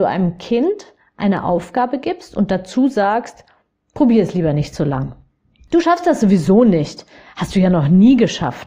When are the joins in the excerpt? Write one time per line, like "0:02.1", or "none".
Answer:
none